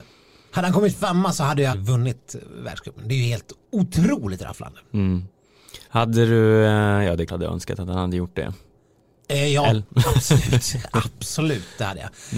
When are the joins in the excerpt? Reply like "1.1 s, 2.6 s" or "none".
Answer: 1.7 s, 3.6 s, 5.9 s, 7.3 s